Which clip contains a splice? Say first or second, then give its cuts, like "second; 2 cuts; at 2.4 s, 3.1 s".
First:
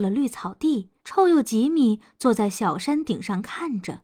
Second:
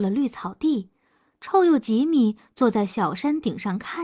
first; 1 cut; at 1.0 s